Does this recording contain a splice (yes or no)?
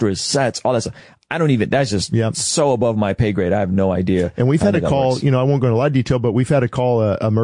no